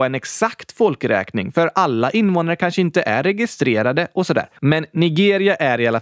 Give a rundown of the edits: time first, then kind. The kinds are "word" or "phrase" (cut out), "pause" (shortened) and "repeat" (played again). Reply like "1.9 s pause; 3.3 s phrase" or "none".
4.6 s pause